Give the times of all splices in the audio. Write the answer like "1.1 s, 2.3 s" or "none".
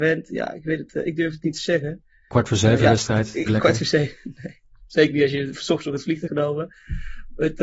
3.5 s, 6.3 s